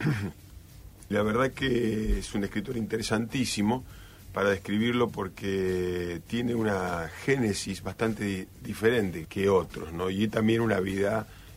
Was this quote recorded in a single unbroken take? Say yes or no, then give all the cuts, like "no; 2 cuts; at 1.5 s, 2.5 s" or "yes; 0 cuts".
no; 2 cuts; at 1.1 s, 9.2 s